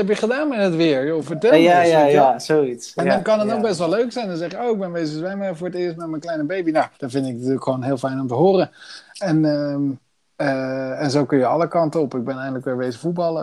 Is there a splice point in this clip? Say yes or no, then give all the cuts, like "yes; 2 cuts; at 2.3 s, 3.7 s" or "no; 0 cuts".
yes; 1 cut; at 6.9 s